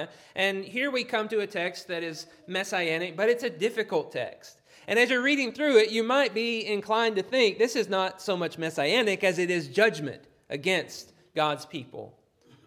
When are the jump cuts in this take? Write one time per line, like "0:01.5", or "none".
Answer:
none

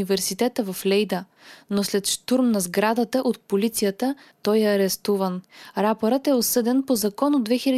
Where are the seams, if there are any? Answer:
none

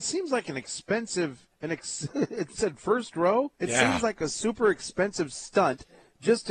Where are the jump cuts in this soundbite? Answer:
0:01.5
0:02.5
0:03.5

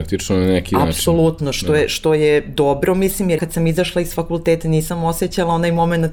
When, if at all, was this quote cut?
0:03.4
0:04.6

